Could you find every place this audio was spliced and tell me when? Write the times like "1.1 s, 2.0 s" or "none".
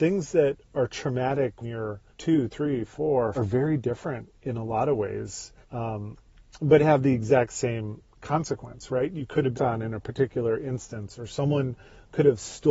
1.6 s, 2.1 s, 3.3 s, 5.6 s, 9.5 s